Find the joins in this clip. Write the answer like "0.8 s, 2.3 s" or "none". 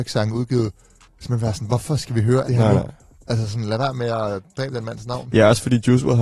2.4 s

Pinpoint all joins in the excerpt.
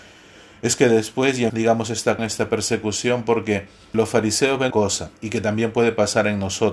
1.5 s, 2.2 s, 3.9 s, 4.7 s, 5.2 s

